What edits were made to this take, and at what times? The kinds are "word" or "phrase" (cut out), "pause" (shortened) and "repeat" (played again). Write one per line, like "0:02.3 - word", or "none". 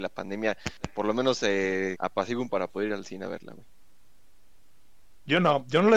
0:02.0 - word
0:02.5 - word